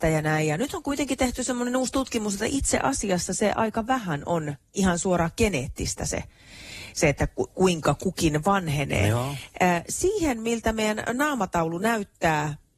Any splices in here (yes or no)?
no